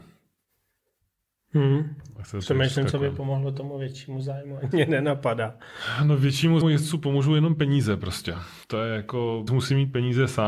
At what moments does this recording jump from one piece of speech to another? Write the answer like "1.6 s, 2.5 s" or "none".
4.7 s, 6.6 s, 8.6 s, 9.5 s